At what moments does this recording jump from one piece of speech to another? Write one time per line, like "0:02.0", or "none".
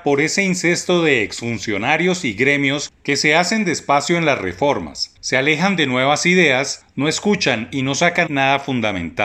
0:08.3